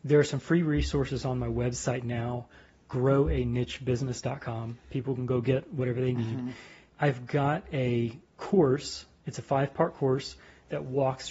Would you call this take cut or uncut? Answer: uncut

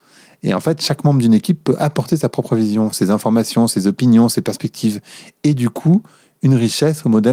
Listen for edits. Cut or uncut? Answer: uncut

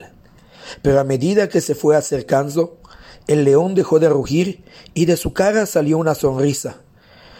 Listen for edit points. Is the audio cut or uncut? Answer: uncut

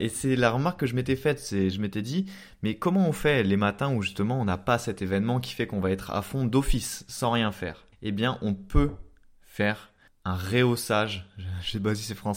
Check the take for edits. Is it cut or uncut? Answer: cut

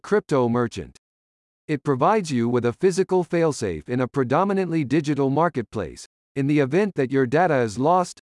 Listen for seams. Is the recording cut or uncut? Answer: uncut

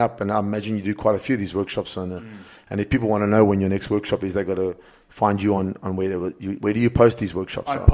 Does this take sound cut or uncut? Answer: uncut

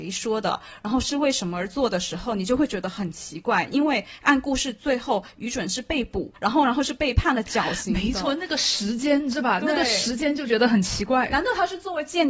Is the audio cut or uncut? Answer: cut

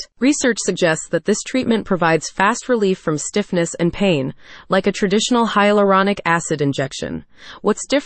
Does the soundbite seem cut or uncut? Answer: uncut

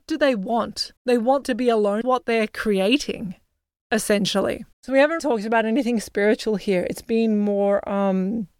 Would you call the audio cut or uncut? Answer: cut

